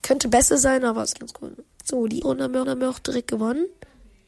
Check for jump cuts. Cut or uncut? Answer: cut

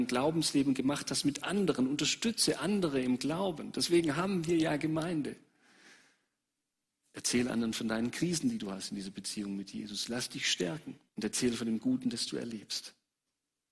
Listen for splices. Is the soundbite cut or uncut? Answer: cut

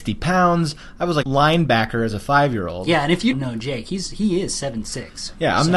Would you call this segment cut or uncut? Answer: cut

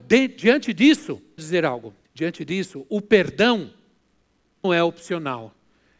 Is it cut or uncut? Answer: cut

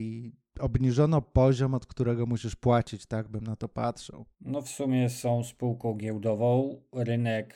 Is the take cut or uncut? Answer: cut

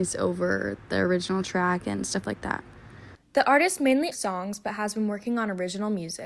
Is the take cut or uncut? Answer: cut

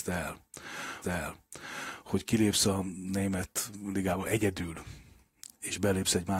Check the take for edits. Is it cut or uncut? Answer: cut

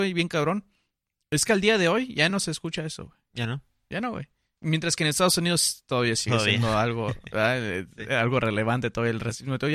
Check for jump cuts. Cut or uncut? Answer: uncut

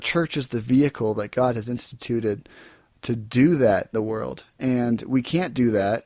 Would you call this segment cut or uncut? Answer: cut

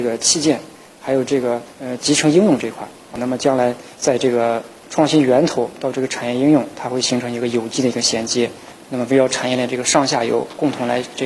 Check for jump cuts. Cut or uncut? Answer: cut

